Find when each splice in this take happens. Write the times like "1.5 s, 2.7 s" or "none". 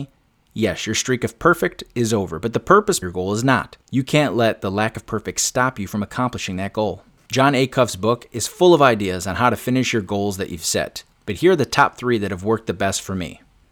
3.0 s, 3.8 s, 7.2 s